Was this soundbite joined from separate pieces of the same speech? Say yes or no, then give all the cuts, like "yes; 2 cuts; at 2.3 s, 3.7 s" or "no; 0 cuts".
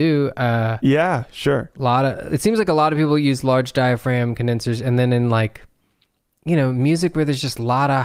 no; 0 cuts